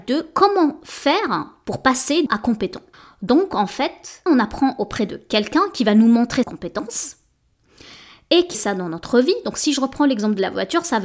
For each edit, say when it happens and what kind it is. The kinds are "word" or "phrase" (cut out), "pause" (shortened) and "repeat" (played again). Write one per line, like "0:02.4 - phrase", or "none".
0:02.3 - word
0:02.9 - pause
0:04.3 - word
0:06.4 - word
0:08.5 - phrase